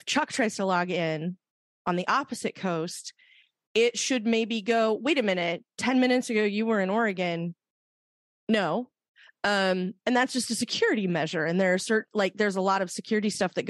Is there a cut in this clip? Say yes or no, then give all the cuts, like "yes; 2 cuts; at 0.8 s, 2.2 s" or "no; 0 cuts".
no; 0 cuts